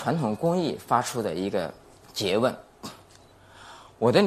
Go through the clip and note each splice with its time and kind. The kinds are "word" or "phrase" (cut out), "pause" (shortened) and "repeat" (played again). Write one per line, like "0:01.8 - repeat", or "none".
0:02.0 - pause